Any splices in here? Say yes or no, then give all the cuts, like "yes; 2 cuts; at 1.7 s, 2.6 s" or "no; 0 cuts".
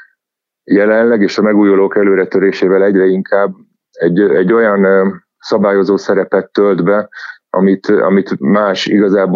no; 0 cuts